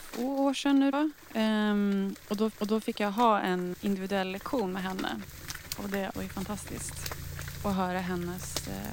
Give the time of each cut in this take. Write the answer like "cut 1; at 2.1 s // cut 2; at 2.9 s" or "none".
cut 1; at 0.9 s // cut 2; at 2.5 s // cut 3; at 3.7 s // cut 4; at 6.1 s